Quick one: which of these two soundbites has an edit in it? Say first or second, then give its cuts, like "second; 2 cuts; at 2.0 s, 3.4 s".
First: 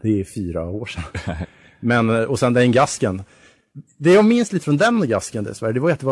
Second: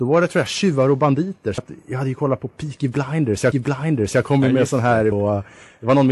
second; 3 cuts; at 1.6 s, 3.5 s, 5.1 s